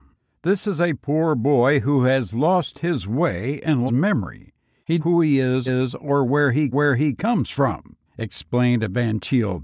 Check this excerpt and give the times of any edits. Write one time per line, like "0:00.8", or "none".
0:03.9
0:05.0
0:05.7
0:06.7
0:08.1